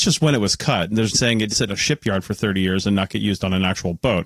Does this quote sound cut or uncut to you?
cut